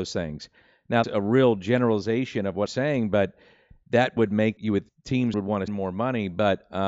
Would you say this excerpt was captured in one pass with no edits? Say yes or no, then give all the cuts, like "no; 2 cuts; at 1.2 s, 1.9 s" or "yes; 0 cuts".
no; 7 cuts; at 1.0 s, 2.7 s, 4.2 s, 4.6 s, 4.9 s, 5.3 s, 5.7 s